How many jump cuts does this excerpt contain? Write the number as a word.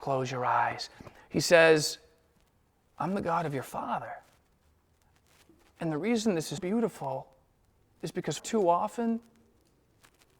two